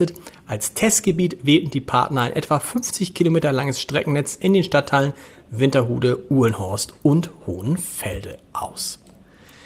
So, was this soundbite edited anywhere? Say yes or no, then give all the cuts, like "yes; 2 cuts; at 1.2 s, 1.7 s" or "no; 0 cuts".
no; 0 cuts